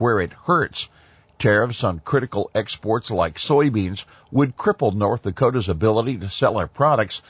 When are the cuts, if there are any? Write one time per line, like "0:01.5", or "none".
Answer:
none